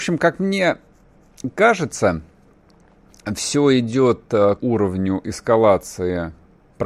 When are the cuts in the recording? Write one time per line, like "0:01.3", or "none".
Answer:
0:04.6